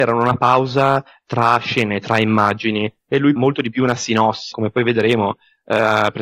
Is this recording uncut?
no; 2 cuts; at 3.4 s, 4.5 s

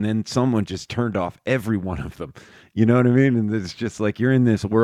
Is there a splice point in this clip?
no; 0 cuts

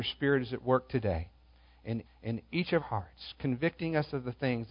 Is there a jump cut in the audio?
yes; 2 cuts; at 2.1 s, 2.8 s

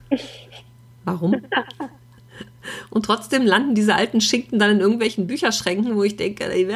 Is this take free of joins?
yes; 0 cuts

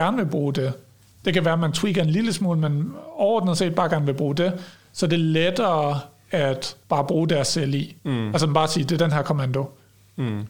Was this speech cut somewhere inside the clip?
yes; 2 cuts; at 6.8 s, 8.0 s

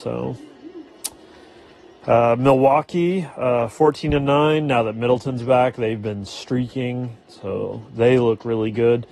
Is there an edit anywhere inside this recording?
no; 0 cuts

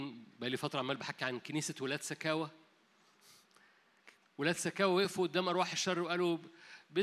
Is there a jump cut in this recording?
no; 0 cuts

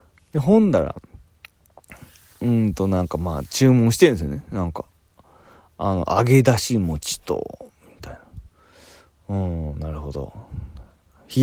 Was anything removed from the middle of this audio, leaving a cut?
no; 0 cuts

